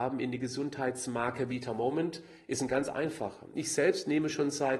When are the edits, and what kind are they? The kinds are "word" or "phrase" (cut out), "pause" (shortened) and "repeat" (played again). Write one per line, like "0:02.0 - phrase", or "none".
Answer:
none